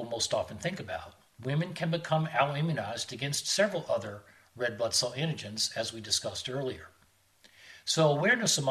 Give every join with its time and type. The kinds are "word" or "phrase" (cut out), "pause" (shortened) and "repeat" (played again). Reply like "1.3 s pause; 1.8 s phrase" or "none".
none